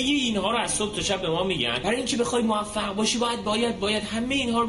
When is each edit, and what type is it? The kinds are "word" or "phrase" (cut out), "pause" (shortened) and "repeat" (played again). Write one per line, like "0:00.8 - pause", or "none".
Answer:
0:03.4 - word